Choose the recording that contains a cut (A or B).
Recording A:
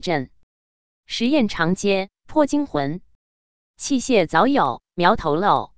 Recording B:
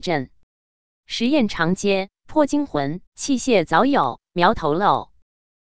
B